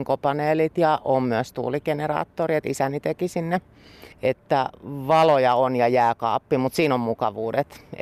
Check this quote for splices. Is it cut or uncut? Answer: cut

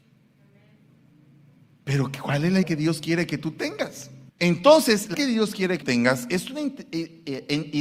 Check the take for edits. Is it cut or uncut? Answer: cut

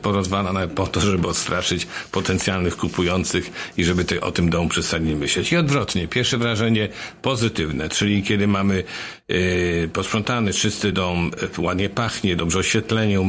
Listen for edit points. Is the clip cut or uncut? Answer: uncut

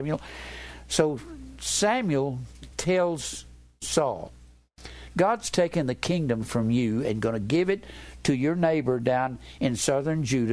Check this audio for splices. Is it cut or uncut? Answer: uncut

